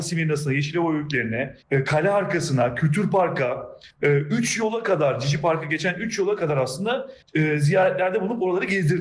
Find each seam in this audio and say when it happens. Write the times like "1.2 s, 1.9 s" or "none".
1.6 s, 3.9 s, 7.2 s